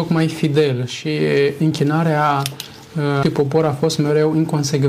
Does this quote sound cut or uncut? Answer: cut